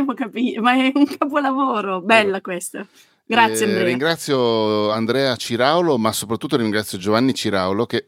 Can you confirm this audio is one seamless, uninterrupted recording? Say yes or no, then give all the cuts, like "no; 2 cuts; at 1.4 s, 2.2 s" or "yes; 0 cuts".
yes; 0 cuts